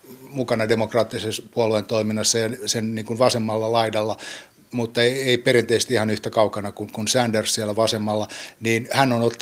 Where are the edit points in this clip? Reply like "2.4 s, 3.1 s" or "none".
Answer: none